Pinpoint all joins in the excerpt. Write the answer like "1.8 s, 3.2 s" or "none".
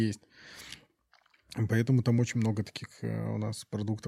none